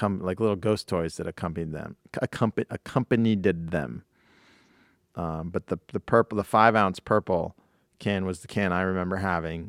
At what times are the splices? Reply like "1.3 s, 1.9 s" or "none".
none